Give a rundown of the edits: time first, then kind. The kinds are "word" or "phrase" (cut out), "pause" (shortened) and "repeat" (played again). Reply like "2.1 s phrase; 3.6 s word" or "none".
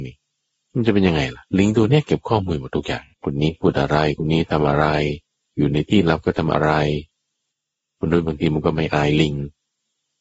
1.5 s pause; 3.1 s pause; 5.4 s pause